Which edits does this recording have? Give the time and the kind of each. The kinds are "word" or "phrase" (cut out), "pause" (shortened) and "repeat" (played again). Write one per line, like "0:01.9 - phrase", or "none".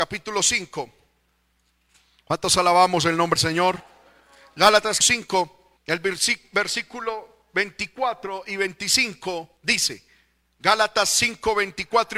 0:03.4 - word
0:05.0 - word
0:05.8 - pause
0:07.4 - pause
0:09.6 - pause

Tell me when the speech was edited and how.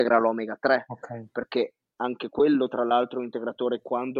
none

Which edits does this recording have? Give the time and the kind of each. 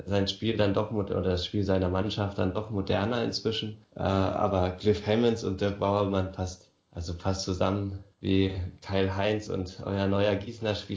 0:03.8 - pause
0:06.8 - pause
0:08.1 - pause

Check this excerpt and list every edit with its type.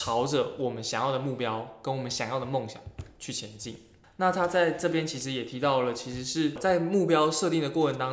0:04.0 - pause

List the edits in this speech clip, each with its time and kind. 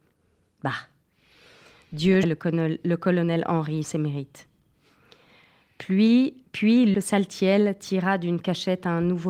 0:02.2 - word
0:03.8 - word
0:06.9 - word

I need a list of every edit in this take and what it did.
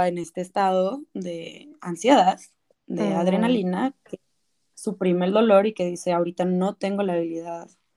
none

